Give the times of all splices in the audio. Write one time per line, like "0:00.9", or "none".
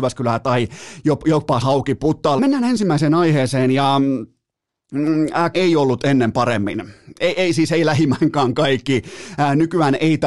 0:01.6
0:02.4
0:05.5